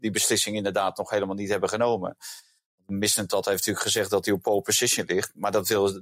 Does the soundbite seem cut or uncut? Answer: uncut